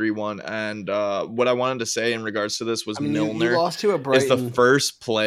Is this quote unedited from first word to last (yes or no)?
yes